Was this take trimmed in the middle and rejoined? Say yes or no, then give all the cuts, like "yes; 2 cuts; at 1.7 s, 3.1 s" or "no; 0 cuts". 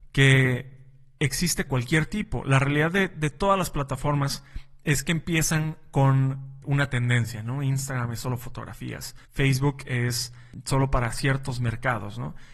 yes; 2 cuts; at 1.7 s, 9.2 s